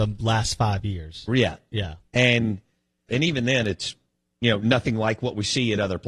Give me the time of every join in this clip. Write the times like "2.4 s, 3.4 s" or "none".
3.1 s